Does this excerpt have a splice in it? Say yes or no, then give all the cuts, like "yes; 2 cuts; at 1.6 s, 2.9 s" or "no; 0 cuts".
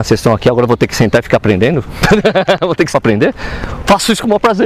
yes; 1 cut; at 2.9 s